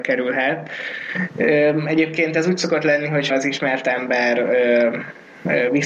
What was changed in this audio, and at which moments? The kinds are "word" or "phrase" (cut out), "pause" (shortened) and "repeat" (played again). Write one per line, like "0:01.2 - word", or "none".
0:03.3 - word